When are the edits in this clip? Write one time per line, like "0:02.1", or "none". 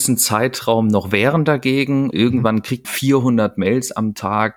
0:02.1
0:02.8